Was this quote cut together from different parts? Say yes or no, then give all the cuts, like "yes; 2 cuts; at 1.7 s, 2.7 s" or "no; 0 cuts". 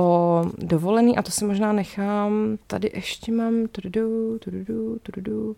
yes; 1 cut; at 2.6 s